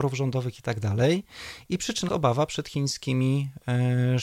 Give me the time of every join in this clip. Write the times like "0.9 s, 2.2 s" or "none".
2.1 s